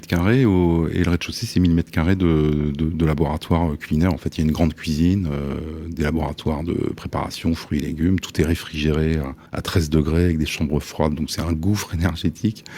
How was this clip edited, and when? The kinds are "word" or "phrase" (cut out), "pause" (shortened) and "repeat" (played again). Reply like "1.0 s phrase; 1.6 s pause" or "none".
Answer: 9.5 s pause